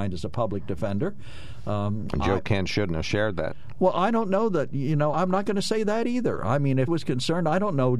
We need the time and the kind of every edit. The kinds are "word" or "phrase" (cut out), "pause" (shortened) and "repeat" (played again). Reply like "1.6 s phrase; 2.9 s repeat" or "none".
5.1 s word; 6.9 s word